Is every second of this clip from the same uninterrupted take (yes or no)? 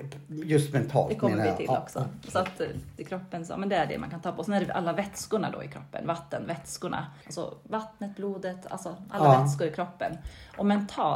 no